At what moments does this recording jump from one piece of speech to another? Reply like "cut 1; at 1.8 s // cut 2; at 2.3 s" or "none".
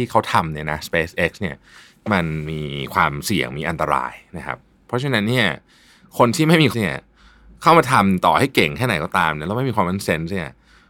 cut 1; at 6.7 s